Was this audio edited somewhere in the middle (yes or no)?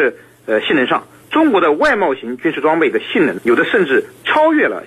yes